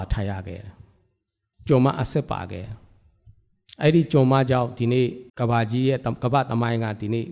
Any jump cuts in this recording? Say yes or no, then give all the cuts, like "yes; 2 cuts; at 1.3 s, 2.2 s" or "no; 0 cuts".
yes; 1 cut; at 5.3 s